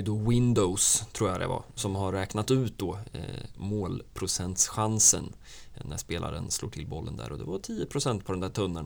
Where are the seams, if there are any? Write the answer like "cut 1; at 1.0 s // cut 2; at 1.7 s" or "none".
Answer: none